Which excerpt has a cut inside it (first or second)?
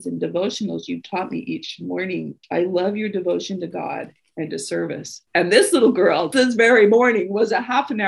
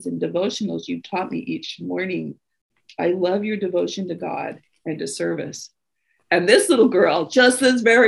first